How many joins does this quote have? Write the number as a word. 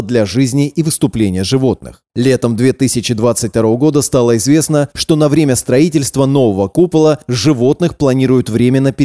zero